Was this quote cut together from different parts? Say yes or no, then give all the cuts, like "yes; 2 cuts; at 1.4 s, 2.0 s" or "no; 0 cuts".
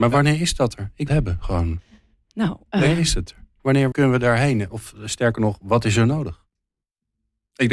yes; 2 cuts; at 1.1 s, 3.9 s